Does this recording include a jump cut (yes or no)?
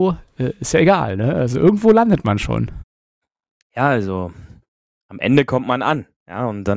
no